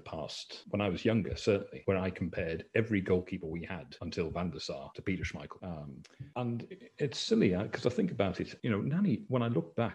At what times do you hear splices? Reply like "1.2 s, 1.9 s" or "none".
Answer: none